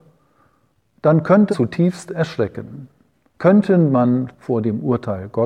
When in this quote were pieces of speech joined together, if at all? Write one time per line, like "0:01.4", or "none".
0:01.5
0:04.3